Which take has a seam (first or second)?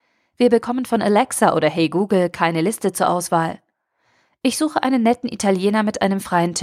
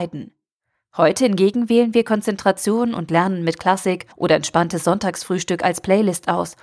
second